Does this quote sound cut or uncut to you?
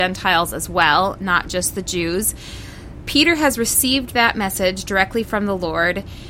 uncut